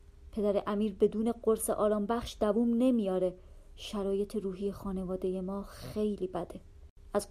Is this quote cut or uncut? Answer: uncut